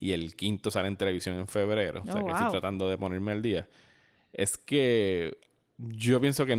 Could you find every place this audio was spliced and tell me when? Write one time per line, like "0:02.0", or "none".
none